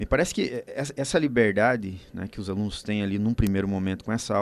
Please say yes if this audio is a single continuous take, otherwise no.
yes